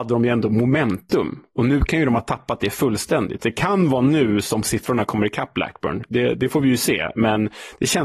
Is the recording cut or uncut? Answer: uncut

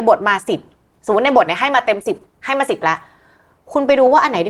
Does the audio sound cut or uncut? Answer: uncut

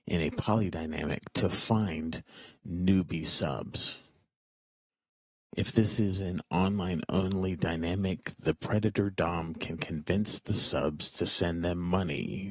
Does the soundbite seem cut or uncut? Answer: uncut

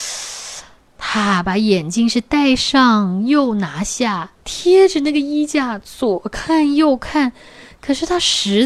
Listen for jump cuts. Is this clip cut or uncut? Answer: cut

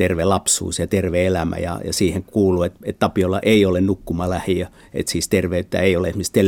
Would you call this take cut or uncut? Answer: uncut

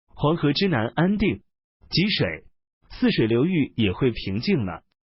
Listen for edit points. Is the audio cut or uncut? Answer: uncut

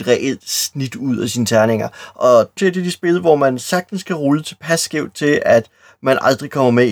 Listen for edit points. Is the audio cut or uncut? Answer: cut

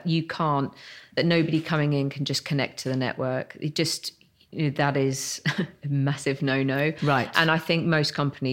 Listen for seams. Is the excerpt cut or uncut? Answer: uncut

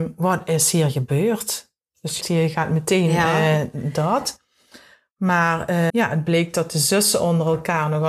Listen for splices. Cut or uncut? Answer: cut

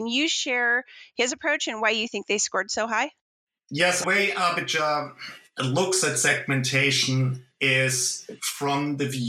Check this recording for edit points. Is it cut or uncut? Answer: cut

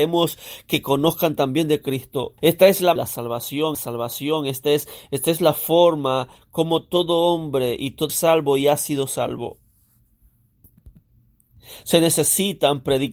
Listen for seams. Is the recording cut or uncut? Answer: cut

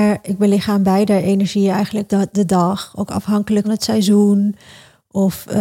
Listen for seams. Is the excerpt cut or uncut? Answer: cut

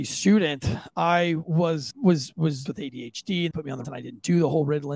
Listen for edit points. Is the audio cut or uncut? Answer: cut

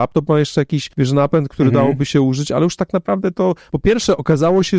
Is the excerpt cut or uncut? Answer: cut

